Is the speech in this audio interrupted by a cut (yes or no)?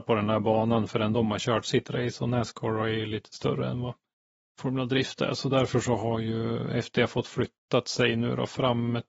no